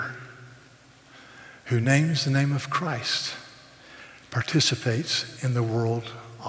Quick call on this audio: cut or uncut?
uncut